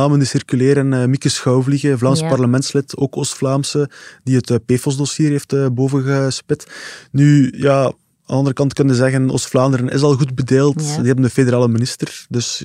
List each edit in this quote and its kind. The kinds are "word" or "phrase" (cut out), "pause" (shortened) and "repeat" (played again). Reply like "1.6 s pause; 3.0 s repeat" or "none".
none